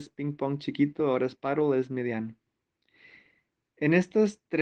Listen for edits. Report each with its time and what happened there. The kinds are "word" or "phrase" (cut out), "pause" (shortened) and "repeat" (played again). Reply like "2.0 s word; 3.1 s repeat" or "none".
none